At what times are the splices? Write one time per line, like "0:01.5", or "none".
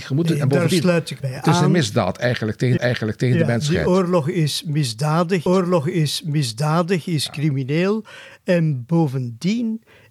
0:01.2
0:02.8
0:05.5